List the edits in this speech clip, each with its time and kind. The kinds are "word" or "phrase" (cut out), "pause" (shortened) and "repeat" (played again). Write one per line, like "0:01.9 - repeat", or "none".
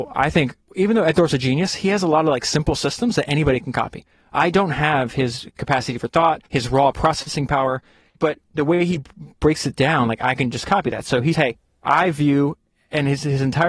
0:06.5 - pause
0:08.5 - pause
0:11.3 - word